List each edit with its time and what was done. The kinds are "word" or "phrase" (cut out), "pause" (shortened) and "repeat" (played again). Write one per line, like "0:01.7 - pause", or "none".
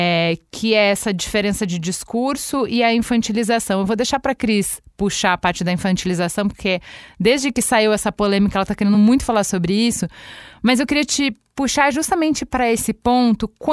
none

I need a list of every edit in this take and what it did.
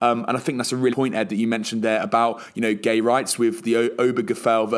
0:00.9 - word

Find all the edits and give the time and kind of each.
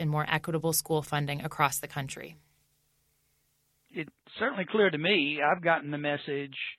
none

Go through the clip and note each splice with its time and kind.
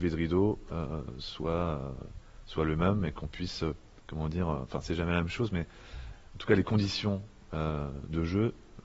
none

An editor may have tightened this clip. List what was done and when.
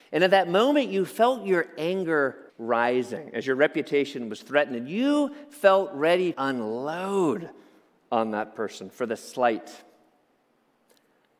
0:02.5 - pause
0:06.3 - word

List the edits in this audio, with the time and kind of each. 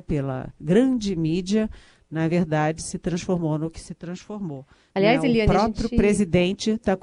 none

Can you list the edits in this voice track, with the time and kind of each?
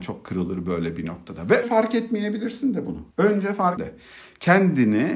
0:01.6 - word
0:03.1 - pause
0:03.8 - word

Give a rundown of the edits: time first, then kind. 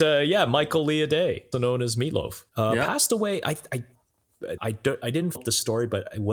0:01.5 - word
0:02.5 - pause
0:04.6 - word
0:05.4 - word

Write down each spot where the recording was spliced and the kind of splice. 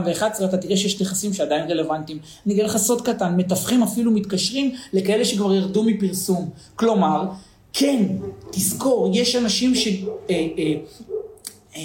none

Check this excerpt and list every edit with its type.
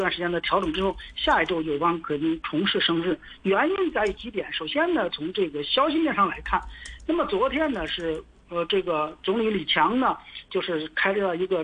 none

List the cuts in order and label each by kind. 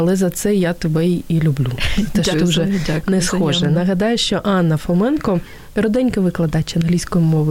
0:02.3 - word

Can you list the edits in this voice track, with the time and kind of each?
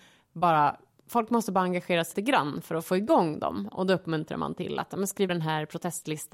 0:02.1 - word
0:05.3 - word

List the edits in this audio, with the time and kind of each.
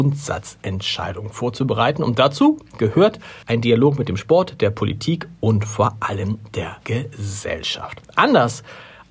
0:03.4 - pause
0:06.8 - pause

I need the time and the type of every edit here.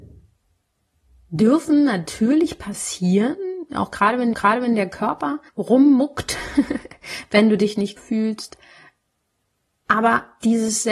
0:04.3 - repeat
0:05.5 - pause
0:08.0 - word

